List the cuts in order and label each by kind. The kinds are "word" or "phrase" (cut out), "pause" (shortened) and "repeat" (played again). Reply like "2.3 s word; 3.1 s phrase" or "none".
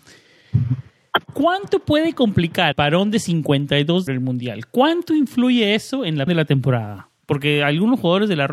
1.2 s pause; 2.7 s word; 4.1 s phrase; 6.3 s word